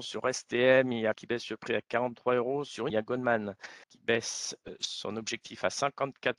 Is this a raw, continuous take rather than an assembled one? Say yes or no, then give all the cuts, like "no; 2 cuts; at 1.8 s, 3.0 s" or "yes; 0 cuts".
no; 3 cuts; at 1.1 s, 2.9 s, 3.8 s